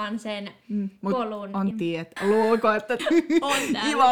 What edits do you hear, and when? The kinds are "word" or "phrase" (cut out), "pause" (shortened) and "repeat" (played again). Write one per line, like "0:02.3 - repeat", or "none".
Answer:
0:01.7 - word
0:02.2 - word
0:03.0 - word